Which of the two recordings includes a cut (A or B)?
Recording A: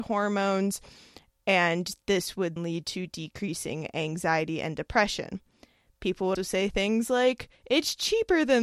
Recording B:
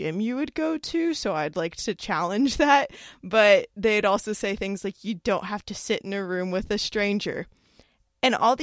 A